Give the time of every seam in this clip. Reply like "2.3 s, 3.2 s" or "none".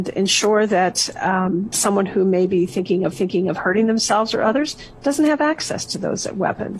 1.7 s, 3.1 s